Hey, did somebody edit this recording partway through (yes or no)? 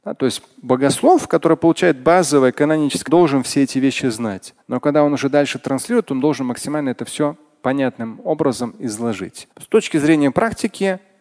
yes